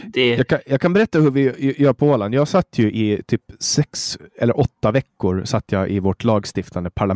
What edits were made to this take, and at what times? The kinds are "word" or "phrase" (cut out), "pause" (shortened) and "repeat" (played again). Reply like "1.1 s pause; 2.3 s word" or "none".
4.3 s pause